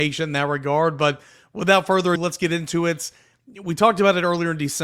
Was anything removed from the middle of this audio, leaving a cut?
yes; 1 cut; at 2.2 s

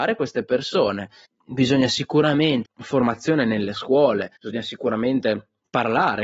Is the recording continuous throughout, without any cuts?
no; 3 cuts; at 1.2 s, 2.7 s, 4.4 s

